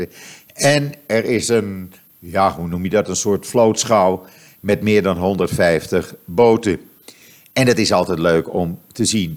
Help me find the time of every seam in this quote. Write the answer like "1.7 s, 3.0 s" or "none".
none